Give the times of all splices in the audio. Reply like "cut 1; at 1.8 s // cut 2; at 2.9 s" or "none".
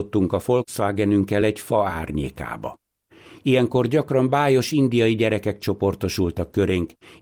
none